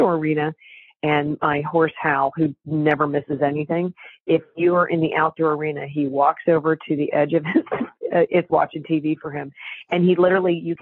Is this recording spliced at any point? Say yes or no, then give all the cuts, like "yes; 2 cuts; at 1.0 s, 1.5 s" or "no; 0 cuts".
yes; 1 cut; at 8.5 s